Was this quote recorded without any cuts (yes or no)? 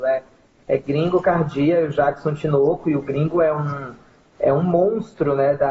yes